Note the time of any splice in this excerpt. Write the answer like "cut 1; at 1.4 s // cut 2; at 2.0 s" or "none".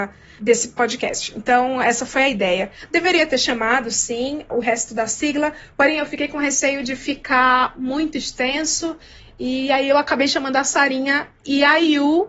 none